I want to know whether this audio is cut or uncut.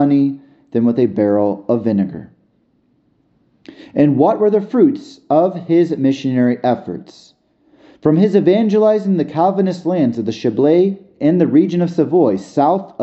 uncut